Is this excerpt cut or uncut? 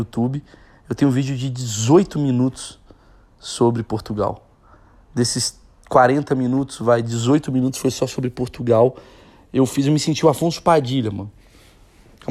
uncut